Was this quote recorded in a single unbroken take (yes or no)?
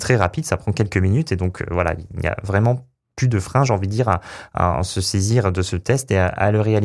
yes